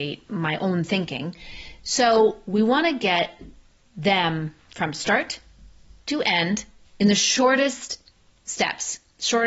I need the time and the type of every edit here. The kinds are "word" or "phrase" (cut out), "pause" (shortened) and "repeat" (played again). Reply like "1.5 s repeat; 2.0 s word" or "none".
none